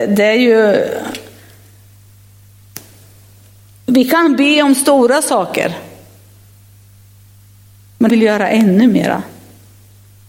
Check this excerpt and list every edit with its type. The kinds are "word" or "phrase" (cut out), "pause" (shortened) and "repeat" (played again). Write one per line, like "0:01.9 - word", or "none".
0:08.1 - word